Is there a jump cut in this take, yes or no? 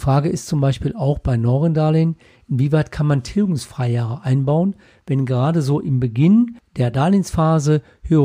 no